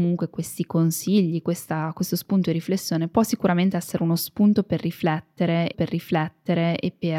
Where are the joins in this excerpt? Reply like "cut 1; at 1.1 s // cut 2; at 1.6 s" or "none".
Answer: cut 1; at 5.7 s